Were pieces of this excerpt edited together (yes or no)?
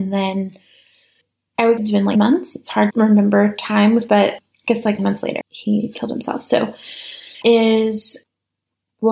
yes